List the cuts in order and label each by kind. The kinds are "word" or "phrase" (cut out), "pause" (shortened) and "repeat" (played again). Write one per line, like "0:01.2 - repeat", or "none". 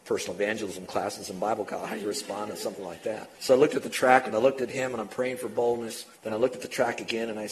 0:03.3 - pause
0:06.1 - pause